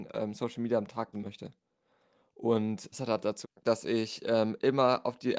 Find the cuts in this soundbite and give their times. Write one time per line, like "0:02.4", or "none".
0:01.1
0:02.9
0:03.4